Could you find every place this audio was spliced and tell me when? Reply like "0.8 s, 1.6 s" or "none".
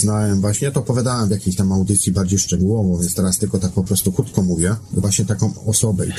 5.0 s